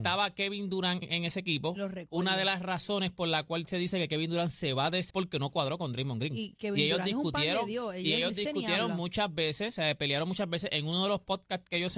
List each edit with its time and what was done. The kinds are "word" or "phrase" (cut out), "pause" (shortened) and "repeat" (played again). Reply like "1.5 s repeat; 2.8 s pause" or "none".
1.0 s word; 5.1 s phrase